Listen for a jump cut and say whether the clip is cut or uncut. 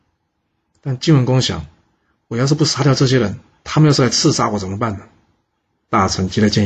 uncut